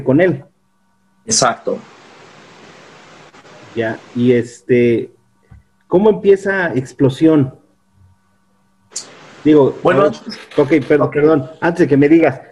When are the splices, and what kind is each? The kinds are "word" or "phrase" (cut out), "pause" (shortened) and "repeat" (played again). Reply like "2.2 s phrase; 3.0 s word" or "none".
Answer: none

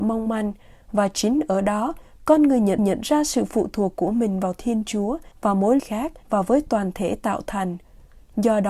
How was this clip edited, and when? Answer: 2.8 s repeat; 5.3 s pause; 5.8 s phrase; 6.2 s pause

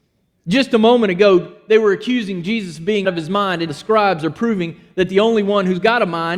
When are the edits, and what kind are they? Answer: 3.0 s word; 3.7 s word

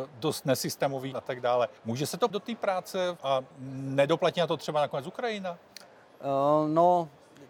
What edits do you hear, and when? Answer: 1.1 s phrase; 1.8 s pause; 2.3 s word; 3.2 s word; 3.5 s pause

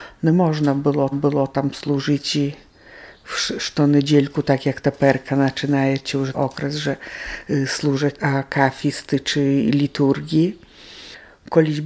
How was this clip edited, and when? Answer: 1.1 s repeat; 6.3 s word; 8.2 s word

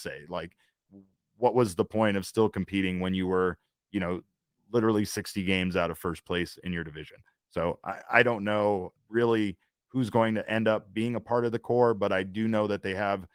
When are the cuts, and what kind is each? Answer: 9.0 s word

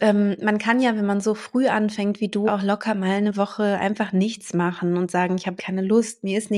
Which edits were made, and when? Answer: 2.5 s word; 5.6 s phrase

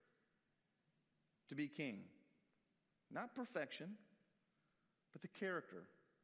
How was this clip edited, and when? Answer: none

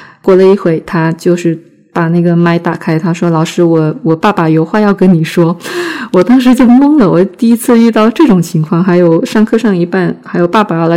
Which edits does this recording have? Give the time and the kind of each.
none

